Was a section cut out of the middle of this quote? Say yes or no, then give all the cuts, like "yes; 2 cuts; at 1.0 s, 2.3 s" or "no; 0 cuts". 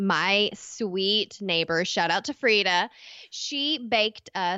no; 0 cuts